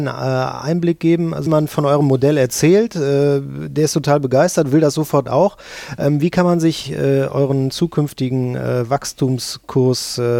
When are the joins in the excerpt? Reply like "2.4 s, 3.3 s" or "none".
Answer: 1.5 s